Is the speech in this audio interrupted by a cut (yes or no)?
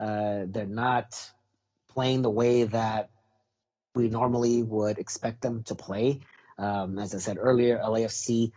no